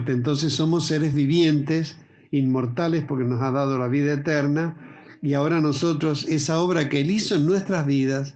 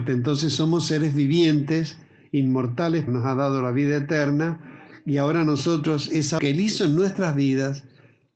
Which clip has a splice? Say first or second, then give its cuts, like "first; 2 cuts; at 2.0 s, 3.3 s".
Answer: second; 2 cuts; at 3.1 s, 6.4 s